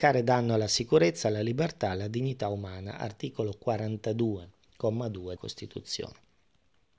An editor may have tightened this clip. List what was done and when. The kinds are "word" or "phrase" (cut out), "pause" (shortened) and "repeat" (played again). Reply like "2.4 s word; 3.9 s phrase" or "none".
5.4 s word